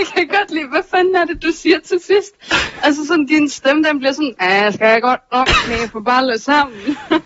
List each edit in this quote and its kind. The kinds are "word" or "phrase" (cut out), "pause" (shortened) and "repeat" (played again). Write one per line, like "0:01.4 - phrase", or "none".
none